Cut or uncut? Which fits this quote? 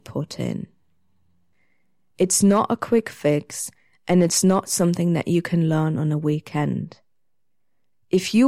uncut